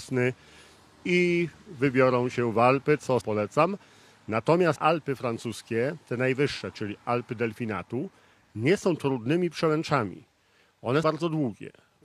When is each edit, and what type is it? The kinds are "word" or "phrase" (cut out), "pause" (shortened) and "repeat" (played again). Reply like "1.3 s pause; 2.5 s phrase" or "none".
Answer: 3.2 s word; 4.8 s word; 11.0 s word